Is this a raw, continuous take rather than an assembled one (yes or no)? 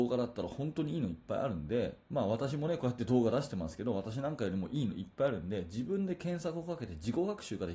no